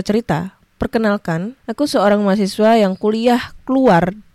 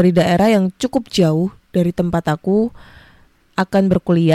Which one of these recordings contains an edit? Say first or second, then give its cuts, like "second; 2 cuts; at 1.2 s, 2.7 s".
first; 1 cut; at 1.6 s